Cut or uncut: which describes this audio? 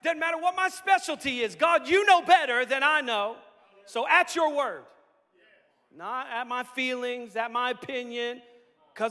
uncut